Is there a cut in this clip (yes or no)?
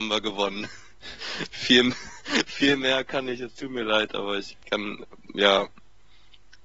no